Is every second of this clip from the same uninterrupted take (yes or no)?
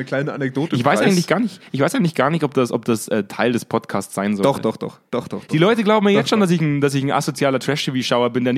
no